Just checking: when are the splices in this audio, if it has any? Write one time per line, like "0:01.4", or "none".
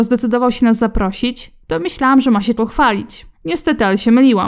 0:02.6
0:03.3

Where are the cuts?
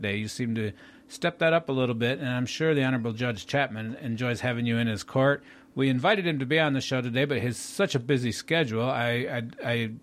none

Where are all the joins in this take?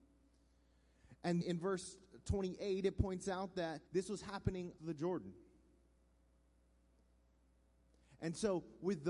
0:01.4
0:03.9
0:04.8

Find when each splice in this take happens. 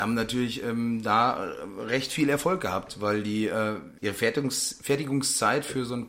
0:04.0

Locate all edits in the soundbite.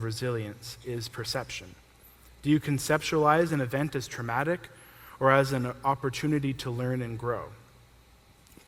none

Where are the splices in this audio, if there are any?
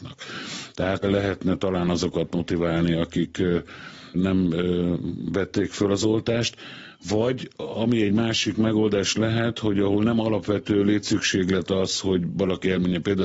0:01.0
0:04.1

